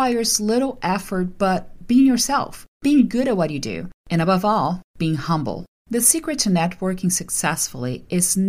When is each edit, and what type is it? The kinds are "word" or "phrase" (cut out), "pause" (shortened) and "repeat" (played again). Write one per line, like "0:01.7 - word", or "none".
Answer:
0:05.8 - pause